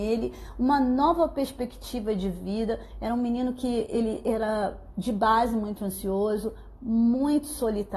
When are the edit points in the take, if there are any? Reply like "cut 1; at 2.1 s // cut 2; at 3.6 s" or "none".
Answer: none